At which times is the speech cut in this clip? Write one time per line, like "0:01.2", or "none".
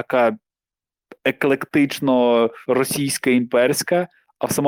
0:02.6